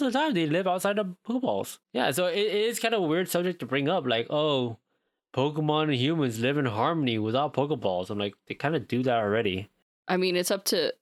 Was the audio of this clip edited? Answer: yes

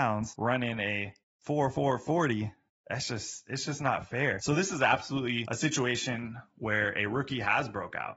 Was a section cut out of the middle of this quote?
no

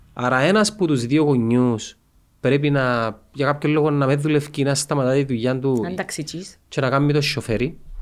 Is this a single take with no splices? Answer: yes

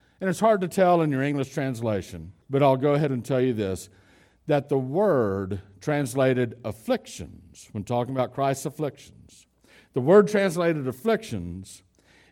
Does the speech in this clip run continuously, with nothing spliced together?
no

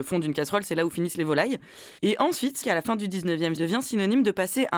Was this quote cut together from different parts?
yes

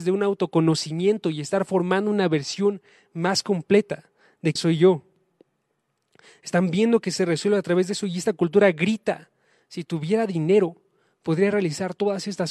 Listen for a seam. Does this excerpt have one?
yes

